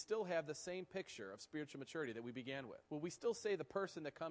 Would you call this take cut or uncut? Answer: cut